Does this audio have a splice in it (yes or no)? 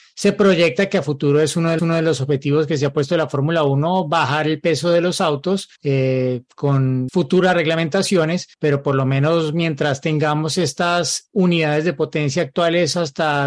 yes